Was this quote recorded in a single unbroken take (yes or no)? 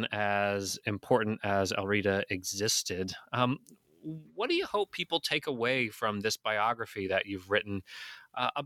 yes